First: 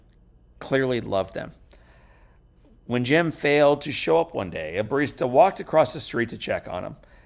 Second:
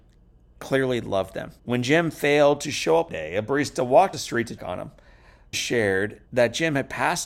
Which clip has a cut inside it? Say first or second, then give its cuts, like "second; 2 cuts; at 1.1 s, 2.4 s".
second; 6 cuts; at 1.6 s, 3.1 s, 4.1 s, 4.6 s, 5.5 s, 6.3 s